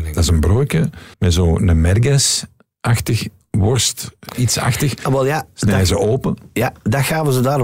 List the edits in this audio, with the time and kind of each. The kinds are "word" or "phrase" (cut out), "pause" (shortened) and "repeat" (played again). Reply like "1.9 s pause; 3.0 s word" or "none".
1.1 s pause